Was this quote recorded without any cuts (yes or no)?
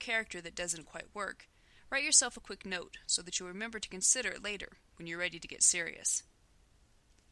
yes